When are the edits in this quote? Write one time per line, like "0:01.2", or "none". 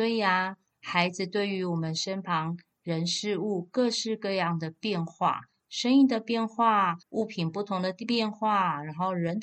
0:07.0